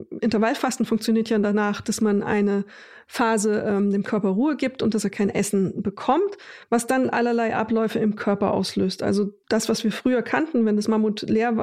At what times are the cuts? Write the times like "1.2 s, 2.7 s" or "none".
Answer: none